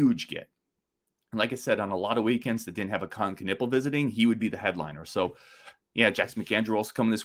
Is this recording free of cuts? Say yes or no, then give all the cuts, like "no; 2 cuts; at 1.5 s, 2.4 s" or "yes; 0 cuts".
yes; 0 cuts